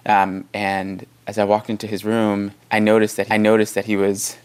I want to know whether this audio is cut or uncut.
cut